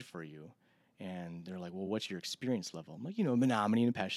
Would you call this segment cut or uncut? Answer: uncut